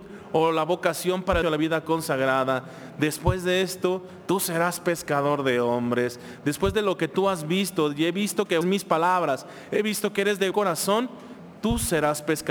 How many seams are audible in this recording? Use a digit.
3